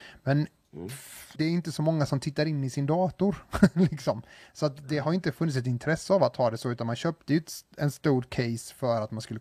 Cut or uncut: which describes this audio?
cut